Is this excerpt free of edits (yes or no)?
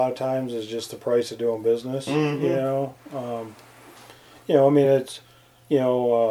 yes